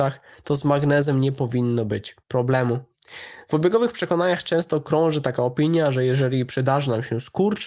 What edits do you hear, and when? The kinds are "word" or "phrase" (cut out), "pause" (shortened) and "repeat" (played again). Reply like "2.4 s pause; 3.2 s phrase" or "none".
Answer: 2.2 s pause